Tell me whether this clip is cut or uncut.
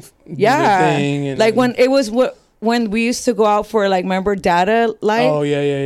uncut